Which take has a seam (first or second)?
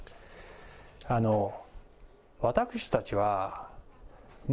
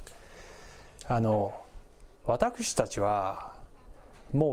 second